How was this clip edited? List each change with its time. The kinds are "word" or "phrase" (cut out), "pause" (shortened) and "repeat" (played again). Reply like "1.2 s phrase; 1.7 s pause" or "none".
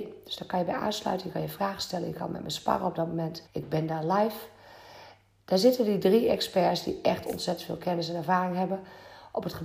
3.5 s pause